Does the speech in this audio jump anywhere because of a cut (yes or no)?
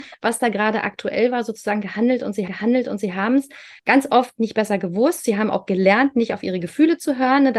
yes